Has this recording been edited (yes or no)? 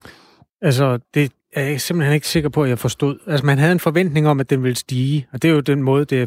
yes